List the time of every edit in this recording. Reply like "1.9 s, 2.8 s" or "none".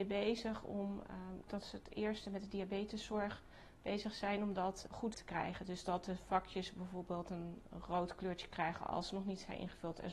1.5 s, 5.1 s